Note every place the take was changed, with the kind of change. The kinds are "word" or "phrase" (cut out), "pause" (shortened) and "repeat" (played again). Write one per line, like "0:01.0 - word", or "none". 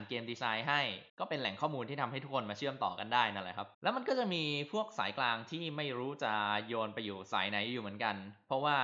0:01.1 - pause
0:03.7 - pause